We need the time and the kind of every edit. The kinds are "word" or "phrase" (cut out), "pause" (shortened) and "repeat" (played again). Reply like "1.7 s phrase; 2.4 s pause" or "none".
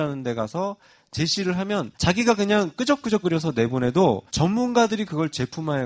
1.9 s pause; 3.2 s word; 4.3 s pause